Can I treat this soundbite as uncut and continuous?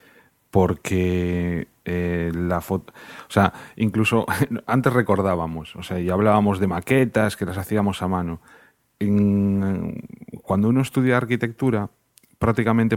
yes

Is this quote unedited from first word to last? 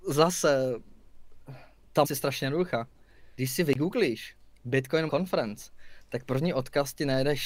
no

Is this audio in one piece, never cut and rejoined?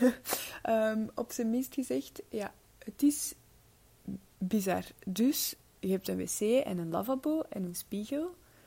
yes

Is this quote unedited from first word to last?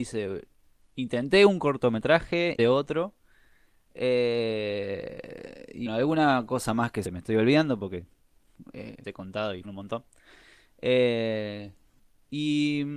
no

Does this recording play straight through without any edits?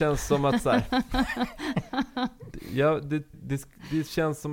no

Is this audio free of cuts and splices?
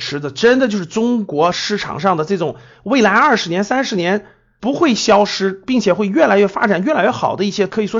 yes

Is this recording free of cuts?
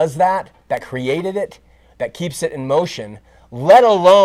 yes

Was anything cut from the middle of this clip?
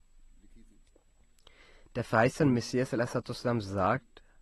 no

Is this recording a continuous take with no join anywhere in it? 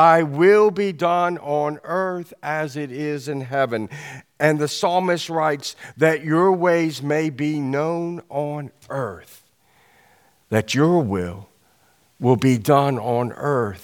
yes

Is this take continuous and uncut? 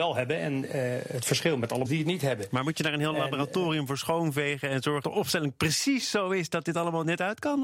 no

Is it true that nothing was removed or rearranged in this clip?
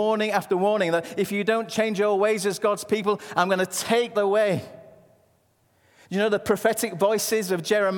no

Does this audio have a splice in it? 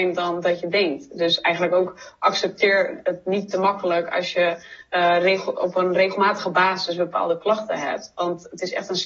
no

